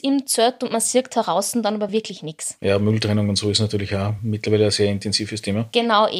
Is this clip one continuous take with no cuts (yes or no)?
yes